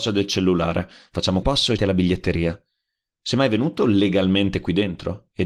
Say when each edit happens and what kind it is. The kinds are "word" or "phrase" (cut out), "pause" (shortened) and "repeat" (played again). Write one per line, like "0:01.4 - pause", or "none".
0:01.4 - word
0:01.8 - phrase